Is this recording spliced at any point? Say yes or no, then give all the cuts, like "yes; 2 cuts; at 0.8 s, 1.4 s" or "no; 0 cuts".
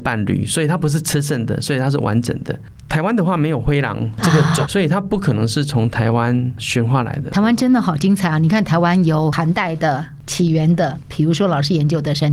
yes; 1 cut; at 4.6 s